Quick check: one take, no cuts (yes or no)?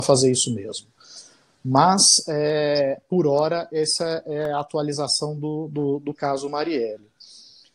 yes